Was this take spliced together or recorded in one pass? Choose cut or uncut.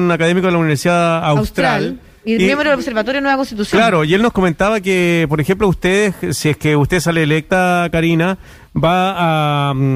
uncut